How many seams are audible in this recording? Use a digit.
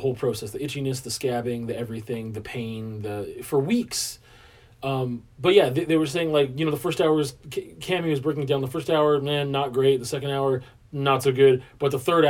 0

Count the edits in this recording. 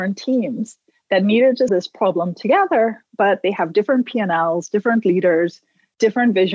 1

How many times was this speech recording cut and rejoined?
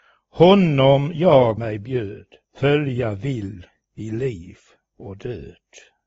3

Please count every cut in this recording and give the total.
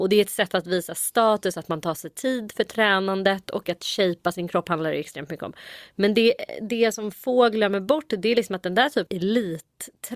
1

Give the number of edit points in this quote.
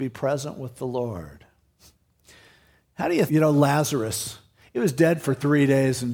1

